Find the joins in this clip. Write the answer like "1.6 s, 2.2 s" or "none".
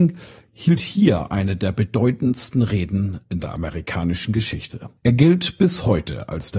5.0 s